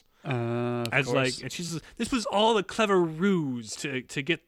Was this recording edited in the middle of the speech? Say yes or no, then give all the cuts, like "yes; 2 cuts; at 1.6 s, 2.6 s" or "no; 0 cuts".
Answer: no; 0 cuts